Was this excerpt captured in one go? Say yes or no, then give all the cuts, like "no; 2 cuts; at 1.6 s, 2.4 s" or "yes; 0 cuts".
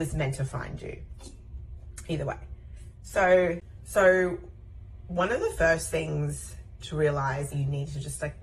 no; 1 cut; at 7.5 s